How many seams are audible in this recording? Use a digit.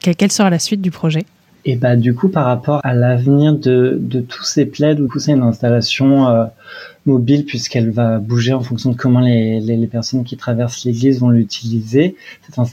2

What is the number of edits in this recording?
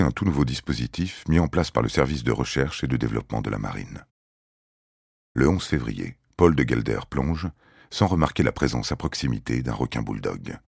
0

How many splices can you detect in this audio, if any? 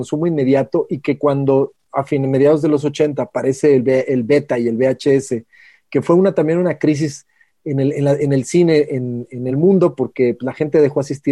0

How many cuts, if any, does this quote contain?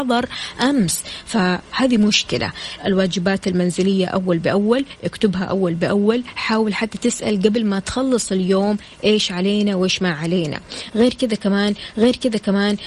2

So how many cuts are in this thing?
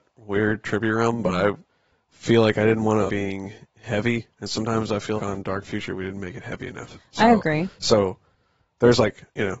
3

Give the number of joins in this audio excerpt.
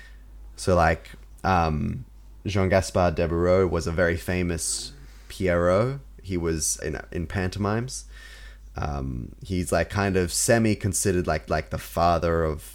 2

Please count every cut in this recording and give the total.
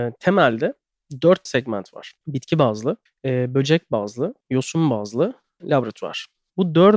5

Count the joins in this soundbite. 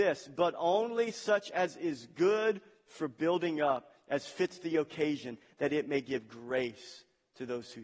0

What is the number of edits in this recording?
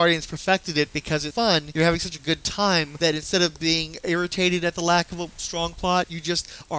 1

